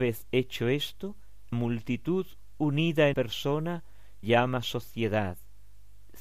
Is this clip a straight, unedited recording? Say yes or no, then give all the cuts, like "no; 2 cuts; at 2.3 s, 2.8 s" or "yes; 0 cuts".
no; 3 cuts; at 1.5 s, 3.1 s, 4.2 s